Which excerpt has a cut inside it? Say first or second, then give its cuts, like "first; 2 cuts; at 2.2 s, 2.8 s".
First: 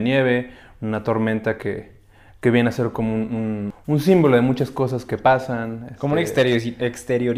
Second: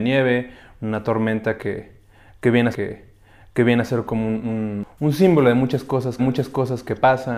second; 2 cuts; at 2.7 s, 6.2 s